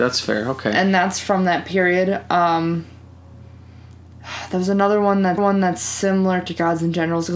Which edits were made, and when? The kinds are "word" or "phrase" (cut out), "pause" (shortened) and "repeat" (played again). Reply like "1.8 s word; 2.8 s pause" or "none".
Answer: 5.4 s repeat